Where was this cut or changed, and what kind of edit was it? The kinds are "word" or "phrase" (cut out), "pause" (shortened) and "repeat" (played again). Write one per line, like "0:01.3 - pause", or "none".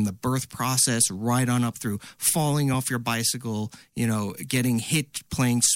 none